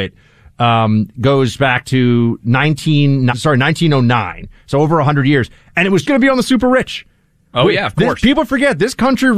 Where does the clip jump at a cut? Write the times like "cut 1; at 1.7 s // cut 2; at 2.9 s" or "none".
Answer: cut 1; at 3.3 s // cut 2; at 6.0 s